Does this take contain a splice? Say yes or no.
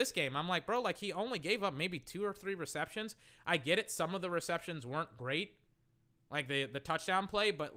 no